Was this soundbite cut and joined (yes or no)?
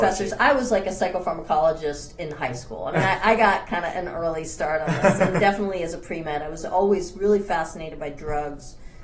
no